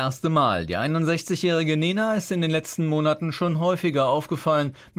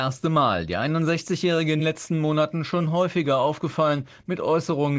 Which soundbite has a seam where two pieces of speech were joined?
second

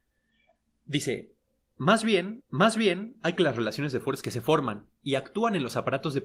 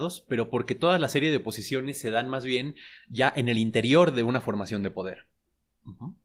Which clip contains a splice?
first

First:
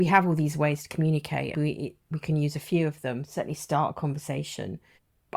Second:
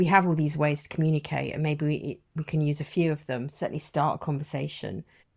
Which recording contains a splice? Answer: first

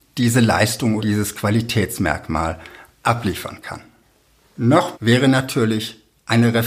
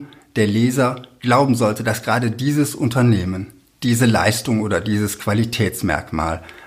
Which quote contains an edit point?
first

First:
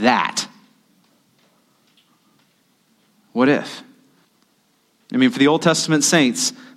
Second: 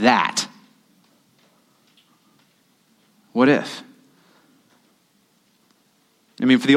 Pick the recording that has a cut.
first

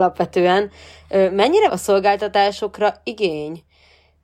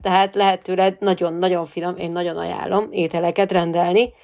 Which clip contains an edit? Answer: first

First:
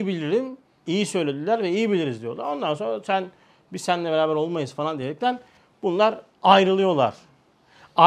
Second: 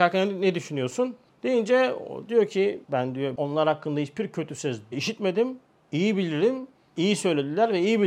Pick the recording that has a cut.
second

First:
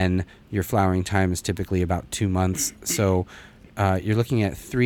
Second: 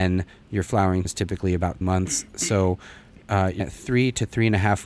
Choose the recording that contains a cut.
second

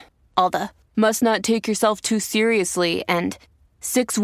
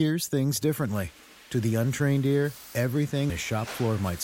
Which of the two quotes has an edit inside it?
second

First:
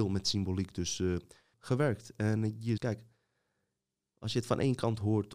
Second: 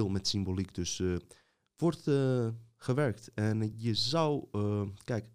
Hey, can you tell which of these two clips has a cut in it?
first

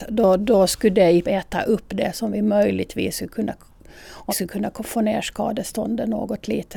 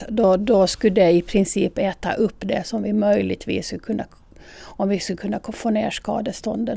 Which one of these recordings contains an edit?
first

